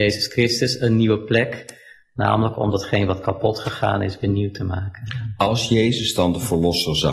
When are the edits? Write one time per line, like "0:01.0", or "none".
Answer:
none